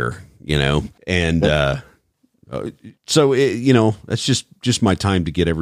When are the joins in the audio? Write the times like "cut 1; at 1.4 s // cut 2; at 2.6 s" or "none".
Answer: cut 1; at 1.0 s // cut 2; at 3.0 s